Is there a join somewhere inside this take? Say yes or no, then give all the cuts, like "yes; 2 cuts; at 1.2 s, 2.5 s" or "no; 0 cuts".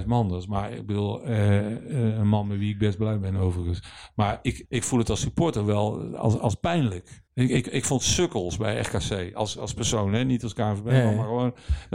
yes; 2 cuts; at 4.6 s, 7.3 s